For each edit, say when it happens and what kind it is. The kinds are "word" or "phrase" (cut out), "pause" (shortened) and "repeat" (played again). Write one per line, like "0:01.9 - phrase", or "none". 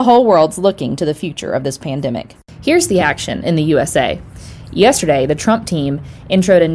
none